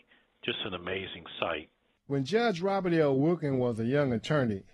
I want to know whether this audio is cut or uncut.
uncut